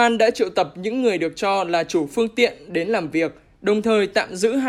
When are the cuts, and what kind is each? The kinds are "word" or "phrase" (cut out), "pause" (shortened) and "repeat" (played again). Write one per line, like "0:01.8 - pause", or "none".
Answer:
none